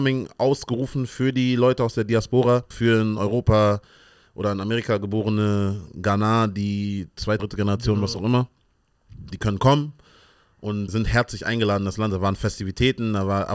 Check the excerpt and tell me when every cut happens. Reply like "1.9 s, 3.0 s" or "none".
2.7 s, 7.4 s, 9.3 s, 10.9 s